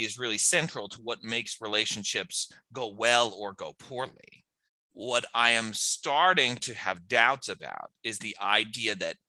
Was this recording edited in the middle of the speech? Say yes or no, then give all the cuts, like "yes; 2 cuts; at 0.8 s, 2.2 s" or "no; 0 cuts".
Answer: yes; 1 cut; at 4.6 s